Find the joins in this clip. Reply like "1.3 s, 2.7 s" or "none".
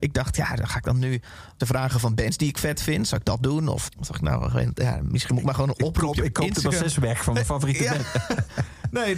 1.6 s, 3.9 s